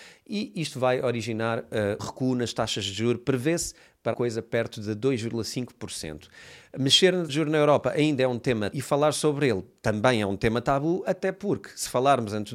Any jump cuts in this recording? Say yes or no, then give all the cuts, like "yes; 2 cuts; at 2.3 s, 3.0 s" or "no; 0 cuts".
yes; 4 cuts; at 2.0 s, 4.1 s, 7.3 s, 8.7 s